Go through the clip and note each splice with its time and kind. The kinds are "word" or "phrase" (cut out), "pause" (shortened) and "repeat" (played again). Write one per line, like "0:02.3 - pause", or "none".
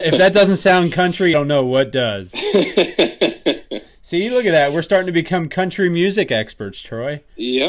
0:01.3 - word